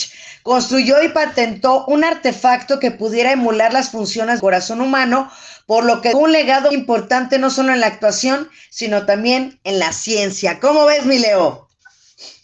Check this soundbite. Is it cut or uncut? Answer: cut